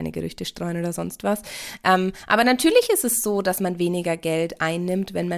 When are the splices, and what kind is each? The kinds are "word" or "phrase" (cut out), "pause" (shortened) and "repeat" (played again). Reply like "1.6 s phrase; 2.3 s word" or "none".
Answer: none

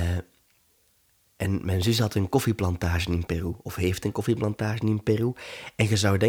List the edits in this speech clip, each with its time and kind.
none

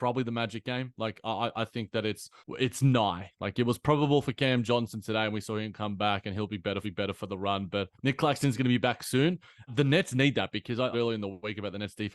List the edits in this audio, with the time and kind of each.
2.4 s pause; 6.8 s repeat; 7.9 s pause; 9.7 s word; 10.9 s phrase

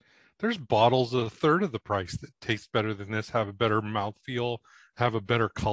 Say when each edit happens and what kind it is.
none

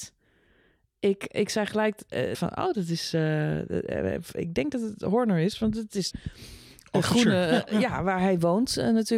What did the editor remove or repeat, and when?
2.3 s phrase; 6.1 s phrase

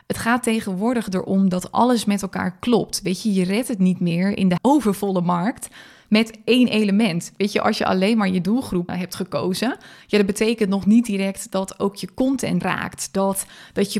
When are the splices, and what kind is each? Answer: 4.6 s word; 8.9 s word; 12.6 s word

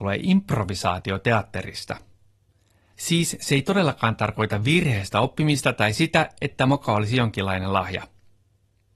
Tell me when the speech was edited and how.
none

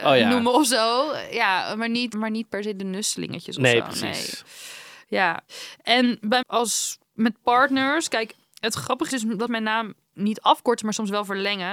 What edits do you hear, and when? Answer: 2.1 s word; 6.4 s word; 9.1 s word; 9.5 s word; 10.1 s word

